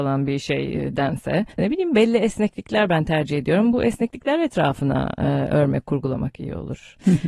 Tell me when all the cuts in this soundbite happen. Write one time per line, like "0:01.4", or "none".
0:01.5